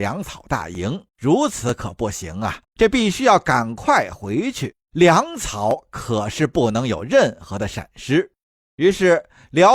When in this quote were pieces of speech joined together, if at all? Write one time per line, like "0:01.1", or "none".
0:01.1
0:02.6
0:04.9
0:08.4